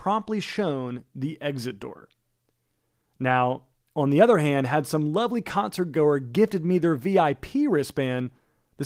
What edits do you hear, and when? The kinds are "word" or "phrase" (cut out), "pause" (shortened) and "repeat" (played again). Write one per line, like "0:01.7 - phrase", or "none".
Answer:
none